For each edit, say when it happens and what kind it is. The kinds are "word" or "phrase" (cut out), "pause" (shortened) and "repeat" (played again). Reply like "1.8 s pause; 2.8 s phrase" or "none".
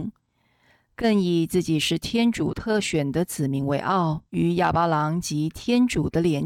4.3 s pause

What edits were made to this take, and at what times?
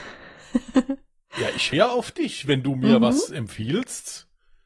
1.7 s word

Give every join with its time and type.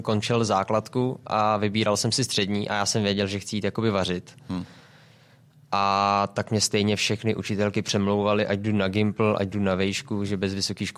none

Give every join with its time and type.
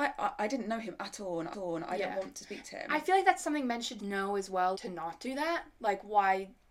1.5 s repeat; 4.0 s word; 4.7 s word

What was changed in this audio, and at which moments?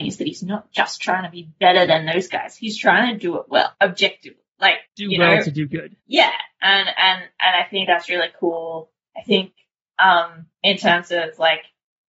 3.7 s pause; 4.8 s pause; 6.0 s pause; 10.5 s pause

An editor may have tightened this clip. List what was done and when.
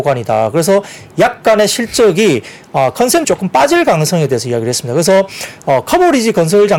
3.2 s word

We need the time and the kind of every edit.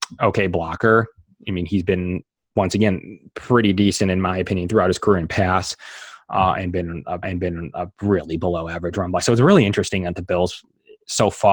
7.2 s repeat

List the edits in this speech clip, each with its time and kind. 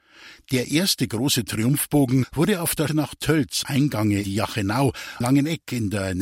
2.9 s word; 3.6 s word; 4.2 s word; 5.2 s word

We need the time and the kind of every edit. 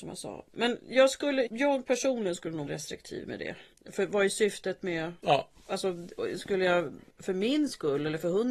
1.5 s word; 2.7 s word; 3.7 s pause; 7.1 s pause

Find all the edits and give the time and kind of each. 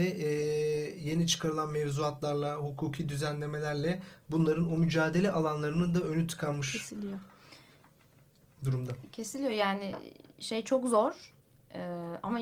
none

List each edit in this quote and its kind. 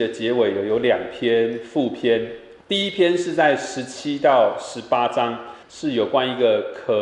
2.6 s pause; 5.6 s pause

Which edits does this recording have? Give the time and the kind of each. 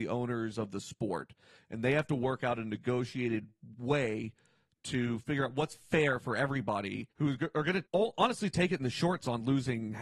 7.1 s pause; 7.9 s pause

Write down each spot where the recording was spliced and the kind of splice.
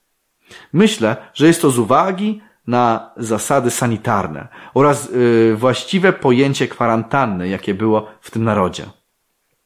none

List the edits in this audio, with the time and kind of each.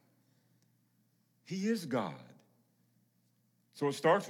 none

